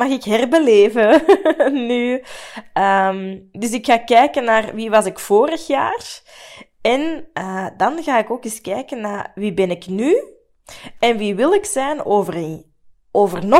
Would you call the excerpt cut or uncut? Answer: uncut